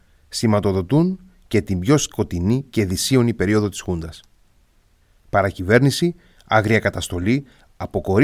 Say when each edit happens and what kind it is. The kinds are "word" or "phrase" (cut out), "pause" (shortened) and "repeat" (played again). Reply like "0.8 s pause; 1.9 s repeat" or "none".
none